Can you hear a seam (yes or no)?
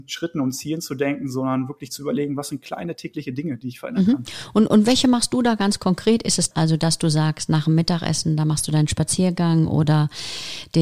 yes